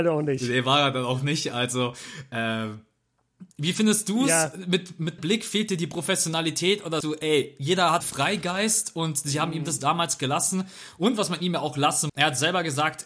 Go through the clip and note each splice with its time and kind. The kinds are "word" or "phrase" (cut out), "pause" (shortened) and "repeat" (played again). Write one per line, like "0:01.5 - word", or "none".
0:03.5 - pause
0:05.2 - word
0:07.0 - word
0:08.0 - phrase
0:12.1 - word